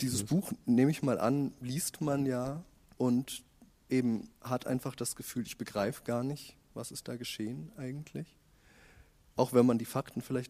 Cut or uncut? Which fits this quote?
cut